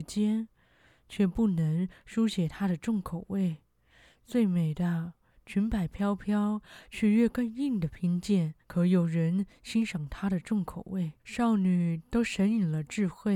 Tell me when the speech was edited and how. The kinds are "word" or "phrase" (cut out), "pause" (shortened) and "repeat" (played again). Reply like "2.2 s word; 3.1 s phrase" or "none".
8.6 s pause; 11.2 s pause